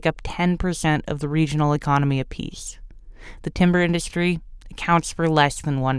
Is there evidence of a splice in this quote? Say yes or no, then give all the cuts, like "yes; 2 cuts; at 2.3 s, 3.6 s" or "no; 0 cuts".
no; 0 cuts